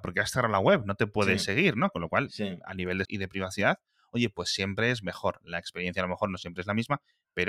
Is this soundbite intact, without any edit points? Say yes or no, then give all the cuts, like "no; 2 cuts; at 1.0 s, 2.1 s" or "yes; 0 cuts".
no; 1 cut; at 3.0 s